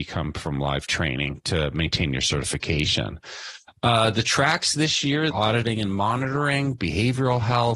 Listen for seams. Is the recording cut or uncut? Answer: cut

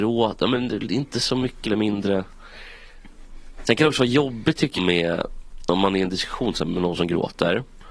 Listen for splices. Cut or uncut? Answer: cut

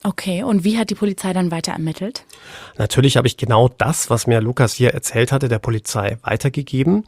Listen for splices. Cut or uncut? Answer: uncut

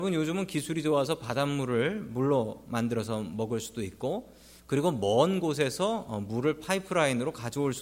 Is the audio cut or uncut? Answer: uncut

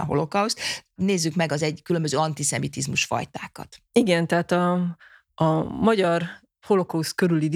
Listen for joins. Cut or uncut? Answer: cut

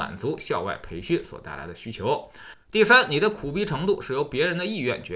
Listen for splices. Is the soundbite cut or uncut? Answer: cut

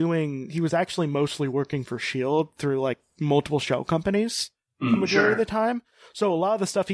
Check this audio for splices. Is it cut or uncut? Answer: cut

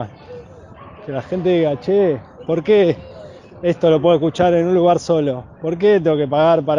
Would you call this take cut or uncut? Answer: uncut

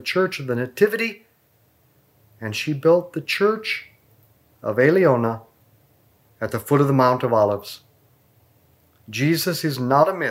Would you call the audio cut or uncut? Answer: uncut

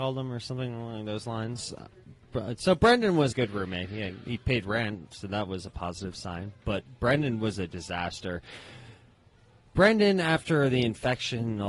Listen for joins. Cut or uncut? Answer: cut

